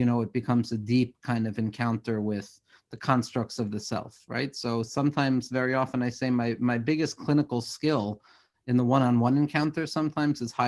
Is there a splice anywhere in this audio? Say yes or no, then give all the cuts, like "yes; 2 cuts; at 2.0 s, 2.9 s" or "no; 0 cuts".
no; 0 cuts